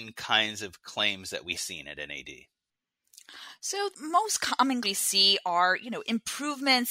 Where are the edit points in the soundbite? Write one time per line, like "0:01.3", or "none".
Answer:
0:01.5
0:03.9
0:04.8